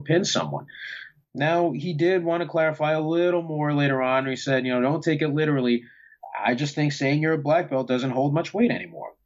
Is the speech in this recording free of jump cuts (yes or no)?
yes